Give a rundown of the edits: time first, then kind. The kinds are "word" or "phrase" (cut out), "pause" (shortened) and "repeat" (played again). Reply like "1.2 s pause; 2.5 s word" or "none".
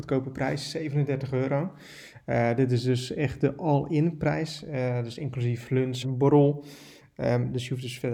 6.0 s word